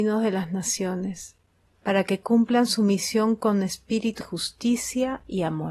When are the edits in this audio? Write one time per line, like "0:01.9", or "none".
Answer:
0:04.2